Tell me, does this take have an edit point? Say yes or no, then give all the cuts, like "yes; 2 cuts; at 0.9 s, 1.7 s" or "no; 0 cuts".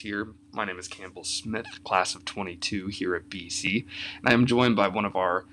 no; 0 cuts